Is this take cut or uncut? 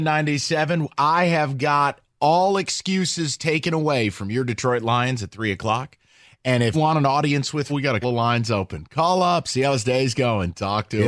cut